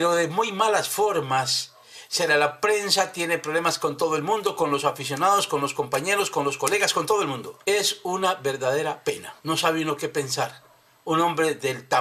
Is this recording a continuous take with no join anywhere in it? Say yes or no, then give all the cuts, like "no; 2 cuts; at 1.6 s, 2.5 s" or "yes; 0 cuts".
no; 3 cuts; at 2.3 s, 7.6 s, 9.4 s